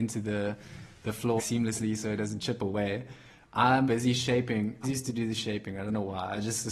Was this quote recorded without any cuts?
no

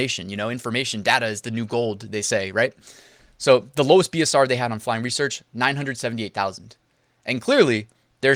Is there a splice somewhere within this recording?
no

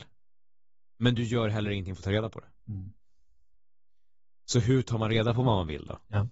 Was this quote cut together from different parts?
no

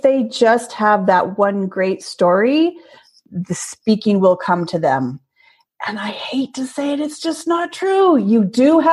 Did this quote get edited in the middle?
no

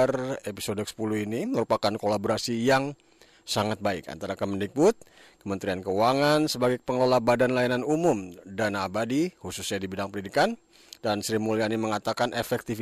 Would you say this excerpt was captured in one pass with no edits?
yes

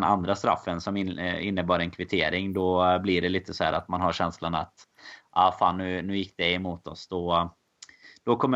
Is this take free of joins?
yes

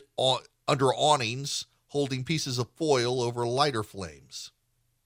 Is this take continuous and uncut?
yes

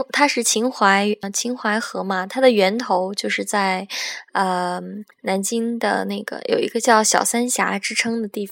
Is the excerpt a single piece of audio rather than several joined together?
no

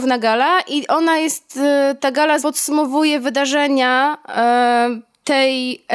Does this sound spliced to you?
yes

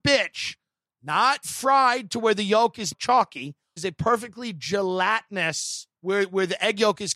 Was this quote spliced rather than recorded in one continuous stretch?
yes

